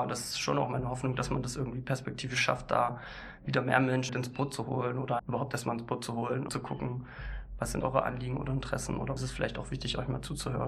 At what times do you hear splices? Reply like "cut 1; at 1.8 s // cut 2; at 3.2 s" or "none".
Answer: cut 1; at 4.1 s // cut 2; at 5.2 s // cut 3; at 6.5 s // cut 4; at 7.8 s // cut 5; at 9.2 s